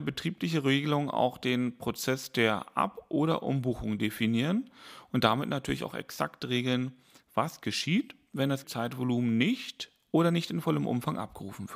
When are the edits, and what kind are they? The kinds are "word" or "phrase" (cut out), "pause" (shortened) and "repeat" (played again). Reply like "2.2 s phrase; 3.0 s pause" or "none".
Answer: 8.6 s word